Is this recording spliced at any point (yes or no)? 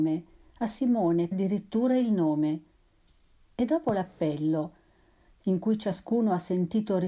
yes